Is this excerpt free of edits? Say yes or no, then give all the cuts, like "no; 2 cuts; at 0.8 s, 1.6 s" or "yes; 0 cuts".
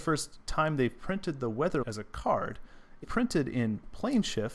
no; 2 cuts; at 1.8 s, 3.0 s